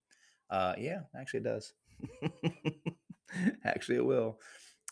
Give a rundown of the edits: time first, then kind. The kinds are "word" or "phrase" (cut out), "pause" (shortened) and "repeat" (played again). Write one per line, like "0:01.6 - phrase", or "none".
none